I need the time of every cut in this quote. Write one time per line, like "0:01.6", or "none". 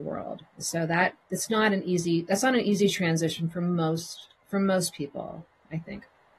0:01.2